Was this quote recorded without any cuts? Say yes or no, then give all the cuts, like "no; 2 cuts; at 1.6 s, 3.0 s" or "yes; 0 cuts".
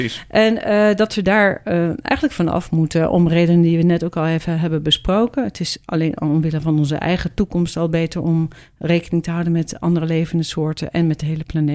yes; 0 cuts